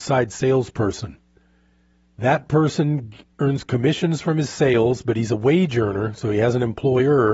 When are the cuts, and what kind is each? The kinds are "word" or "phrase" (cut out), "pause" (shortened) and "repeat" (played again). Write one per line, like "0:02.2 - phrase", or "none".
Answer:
none